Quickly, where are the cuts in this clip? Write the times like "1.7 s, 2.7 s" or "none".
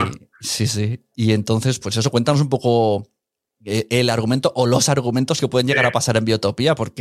1.8 s